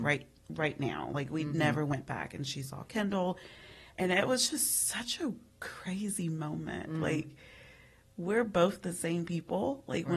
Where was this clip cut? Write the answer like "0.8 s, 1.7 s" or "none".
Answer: none